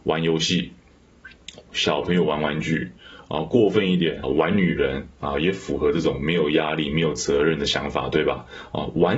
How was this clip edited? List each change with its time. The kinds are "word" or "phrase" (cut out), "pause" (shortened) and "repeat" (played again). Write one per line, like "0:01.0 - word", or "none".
0:04.2 - phrase

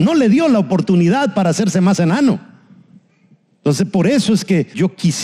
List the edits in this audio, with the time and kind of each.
none

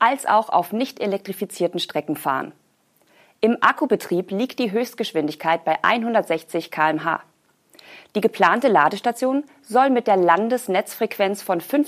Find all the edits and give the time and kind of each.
none

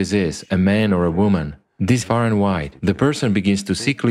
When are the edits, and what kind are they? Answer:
0:02.0 - word

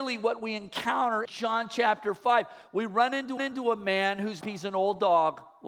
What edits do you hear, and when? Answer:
0:01.3 - word
0:03.4 - repeat
0:04.4 - phrase

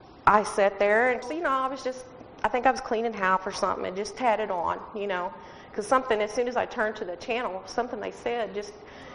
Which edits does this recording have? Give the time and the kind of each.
0:01.2 - phrase
0:03.5 - phrase
0:04.1 - word

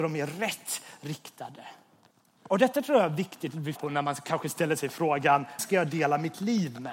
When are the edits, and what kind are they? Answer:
0:02.1 - pause
0:03.8 - word
0:05.6 - word

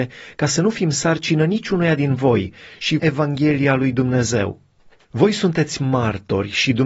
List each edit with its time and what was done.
0:03.0 - phrase
0:04.8 - pause

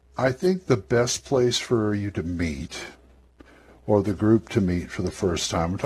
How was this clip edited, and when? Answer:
none

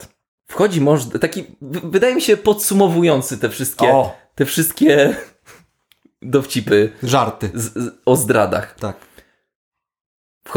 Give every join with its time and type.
none

